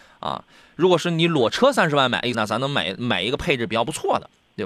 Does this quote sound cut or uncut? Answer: cut